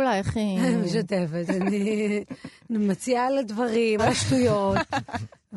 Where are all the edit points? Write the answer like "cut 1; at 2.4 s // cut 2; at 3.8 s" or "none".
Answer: cut 1; at 1.5 s // cut 2; at 4.0 s